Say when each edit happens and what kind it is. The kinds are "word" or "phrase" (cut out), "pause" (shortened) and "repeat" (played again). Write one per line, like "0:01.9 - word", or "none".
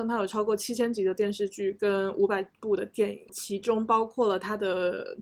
none